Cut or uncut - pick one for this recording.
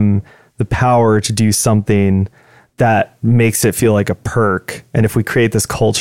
uncut